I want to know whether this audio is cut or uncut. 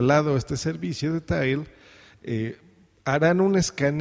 uncut